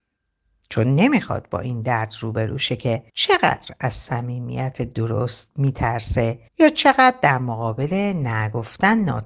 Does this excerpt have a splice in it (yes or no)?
yes